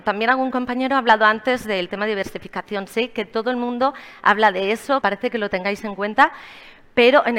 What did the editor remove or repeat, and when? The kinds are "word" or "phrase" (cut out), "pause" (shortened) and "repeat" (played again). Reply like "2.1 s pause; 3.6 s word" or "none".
5.0 s phrase